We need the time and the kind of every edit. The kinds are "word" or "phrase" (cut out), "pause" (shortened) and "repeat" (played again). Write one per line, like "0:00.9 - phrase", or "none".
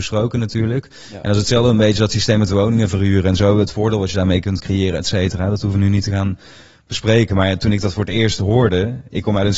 none